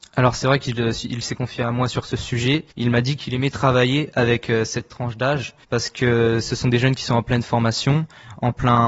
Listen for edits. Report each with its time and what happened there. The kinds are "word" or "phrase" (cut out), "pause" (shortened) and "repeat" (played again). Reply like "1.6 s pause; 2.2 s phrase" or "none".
2.7 s pause; 5.6 s pause